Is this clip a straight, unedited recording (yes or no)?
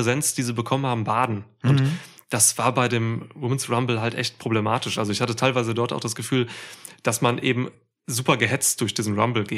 yes